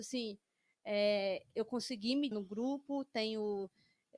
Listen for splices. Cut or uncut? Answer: cut